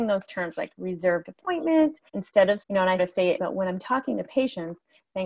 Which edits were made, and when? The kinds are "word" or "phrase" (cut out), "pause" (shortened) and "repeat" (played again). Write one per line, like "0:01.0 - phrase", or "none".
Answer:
0:02.1 - pause
0:02.6 - word
0:03.0 - word
0:03.4 - word